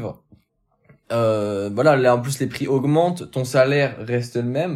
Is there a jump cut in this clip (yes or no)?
no